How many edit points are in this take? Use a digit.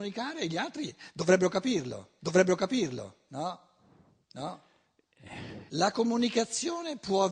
2